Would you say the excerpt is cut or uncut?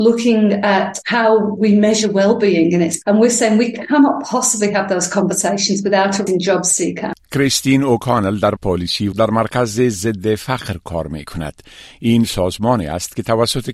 cut